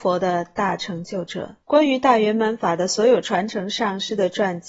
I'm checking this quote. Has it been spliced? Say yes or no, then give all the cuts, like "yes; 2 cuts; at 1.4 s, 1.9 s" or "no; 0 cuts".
yes; 1 cut; at 1.6 s